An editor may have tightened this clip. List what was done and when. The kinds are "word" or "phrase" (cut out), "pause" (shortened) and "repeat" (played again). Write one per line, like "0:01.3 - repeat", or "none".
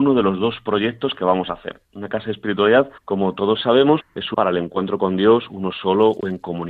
0:03.0 - pause
0:04.0 - word
0:04.3 - word